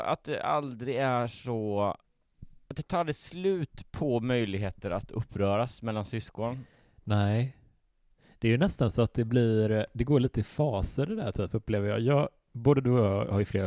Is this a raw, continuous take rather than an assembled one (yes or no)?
yes